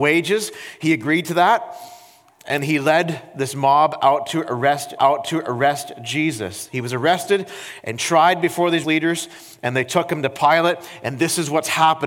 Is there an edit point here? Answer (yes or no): yes